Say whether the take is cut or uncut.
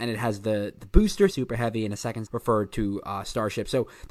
cut